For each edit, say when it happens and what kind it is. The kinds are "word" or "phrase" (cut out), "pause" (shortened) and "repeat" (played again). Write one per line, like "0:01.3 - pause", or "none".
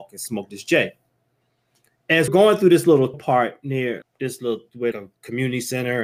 0:02.3 - word
0:03.1 - word
0:04.0 - word
0:04.9 - word